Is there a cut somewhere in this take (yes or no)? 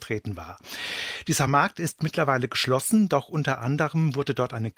no